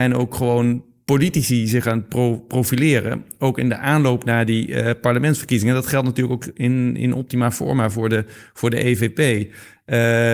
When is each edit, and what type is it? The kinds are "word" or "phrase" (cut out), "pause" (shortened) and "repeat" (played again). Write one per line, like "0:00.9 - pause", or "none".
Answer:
none